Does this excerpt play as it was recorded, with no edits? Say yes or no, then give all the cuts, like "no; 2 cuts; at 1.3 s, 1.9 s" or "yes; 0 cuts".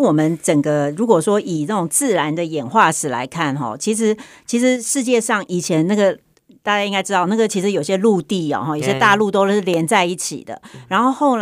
yes; 0 cuts